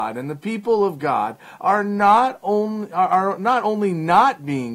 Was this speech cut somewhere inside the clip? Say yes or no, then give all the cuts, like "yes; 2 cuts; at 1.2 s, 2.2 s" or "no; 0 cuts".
no; 0 cuts